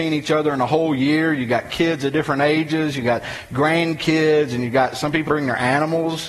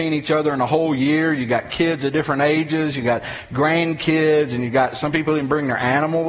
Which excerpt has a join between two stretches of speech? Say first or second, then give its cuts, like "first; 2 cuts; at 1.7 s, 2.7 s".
first; 1 cut; at 5.3 s